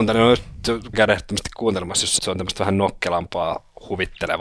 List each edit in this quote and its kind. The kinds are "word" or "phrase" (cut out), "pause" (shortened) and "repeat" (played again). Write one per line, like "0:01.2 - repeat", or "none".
0:00.9 - word
0:02.2 - phrase